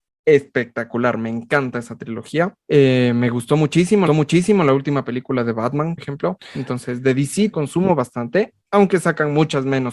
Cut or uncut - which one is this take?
cut